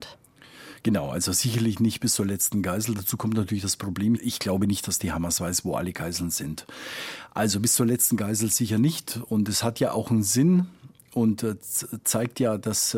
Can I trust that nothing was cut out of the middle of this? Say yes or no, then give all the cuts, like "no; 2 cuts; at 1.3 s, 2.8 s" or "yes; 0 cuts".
yes; 0 cuts